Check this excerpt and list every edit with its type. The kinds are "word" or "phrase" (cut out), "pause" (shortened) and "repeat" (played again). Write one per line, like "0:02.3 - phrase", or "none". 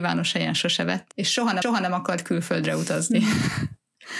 0:01.1 - word
0:01.6 - repeat